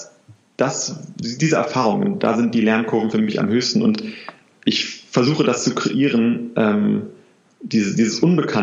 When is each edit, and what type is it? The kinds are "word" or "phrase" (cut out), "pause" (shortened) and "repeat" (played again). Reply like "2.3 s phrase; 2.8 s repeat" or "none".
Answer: none